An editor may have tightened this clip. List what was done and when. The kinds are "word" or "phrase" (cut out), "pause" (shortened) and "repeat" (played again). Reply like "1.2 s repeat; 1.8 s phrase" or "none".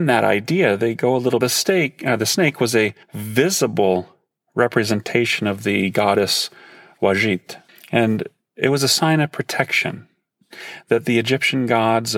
1.4 s phrase; 3.0 s pause; 7.7 s pause